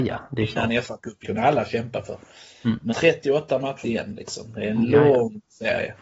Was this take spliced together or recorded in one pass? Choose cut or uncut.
cut